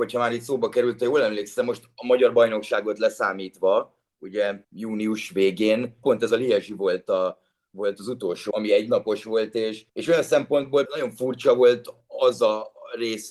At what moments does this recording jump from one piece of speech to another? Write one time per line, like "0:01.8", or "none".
0:04.6
0:06.0
0:08.5
0:09.9
0:10.9

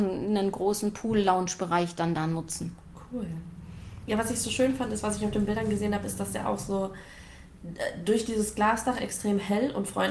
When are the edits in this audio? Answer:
none

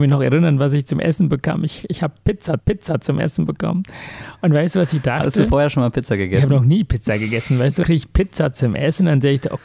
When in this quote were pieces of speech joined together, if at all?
0:02.6
0:07.8

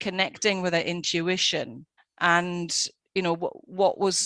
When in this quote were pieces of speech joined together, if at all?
0:02.0

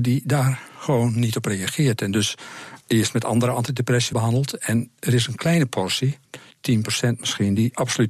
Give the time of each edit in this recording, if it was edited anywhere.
0:02.8
0:04.1
0:06.3

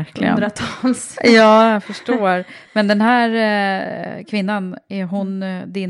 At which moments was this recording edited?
none

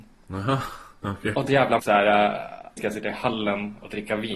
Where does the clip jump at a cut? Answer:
0:01.5
0:01.8
0:02.8

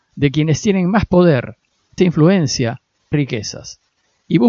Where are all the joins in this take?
0:02.0
0:03.1

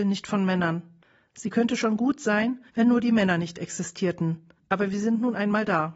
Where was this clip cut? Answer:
0:02.7
0:04.6

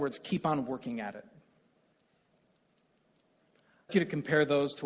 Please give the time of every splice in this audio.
0:03.9

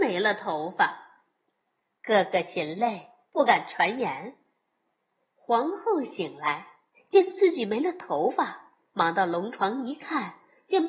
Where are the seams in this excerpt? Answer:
none

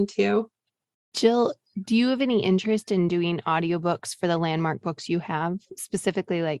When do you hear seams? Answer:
none

